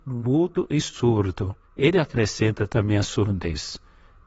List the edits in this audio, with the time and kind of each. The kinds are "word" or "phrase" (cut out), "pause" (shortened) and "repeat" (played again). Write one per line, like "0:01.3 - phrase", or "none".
0:01.6 - pause